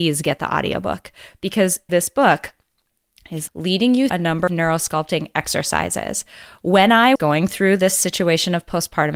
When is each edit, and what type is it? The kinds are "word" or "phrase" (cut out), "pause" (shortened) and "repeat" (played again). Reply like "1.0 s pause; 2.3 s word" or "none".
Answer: 1.9 s word; 3.5 s word; 4.1 s word; 4.5 s word; 7.1 s word